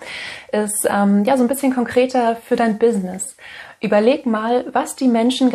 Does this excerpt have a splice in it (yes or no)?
no